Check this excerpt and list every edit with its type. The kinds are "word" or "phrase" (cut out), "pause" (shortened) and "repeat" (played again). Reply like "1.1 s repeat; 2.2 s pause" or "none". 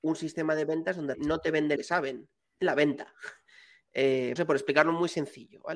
1.1 s word; 1.8 s word; 2.6 s word; 4.4 s word